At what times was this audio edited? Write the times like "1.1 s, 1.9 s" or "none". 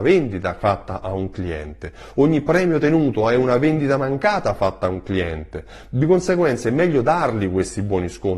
none